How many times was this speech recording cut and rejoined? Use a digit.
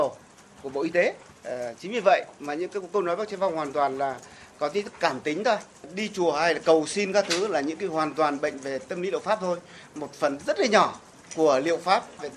0